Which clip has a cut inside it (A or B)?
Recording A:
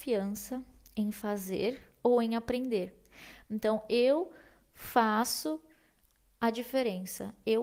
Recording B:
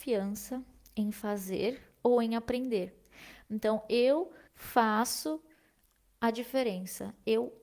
B